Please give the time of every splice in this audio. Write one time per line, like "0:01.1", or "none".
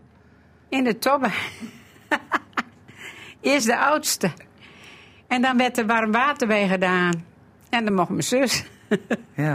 none